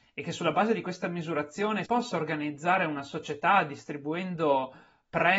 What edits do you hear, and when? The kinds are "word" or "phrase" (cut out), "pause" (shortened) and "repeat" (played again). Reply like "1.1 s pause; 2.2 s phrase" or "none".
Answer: 1.8 s word